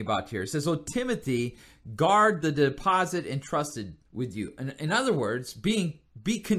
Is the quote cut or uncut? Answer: cut